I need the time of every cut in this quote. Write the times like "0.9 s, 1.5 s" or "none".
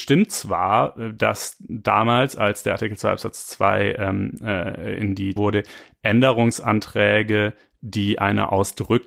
5.4 s